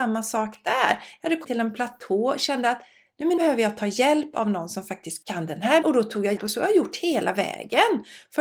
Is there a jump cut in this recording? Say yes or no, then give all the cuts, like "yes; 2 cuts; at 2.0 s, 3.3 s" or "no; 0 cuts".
yes; 5 cuts; at 1.4 s, 3.4 s, 5.2 s, 5.8 s, 6.4 s